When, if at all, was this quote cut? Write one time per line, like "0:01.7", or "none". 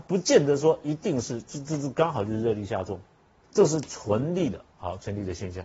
0:03.4